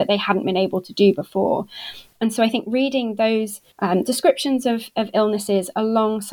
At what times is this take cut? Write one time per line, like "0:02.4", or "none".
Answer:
0:03.7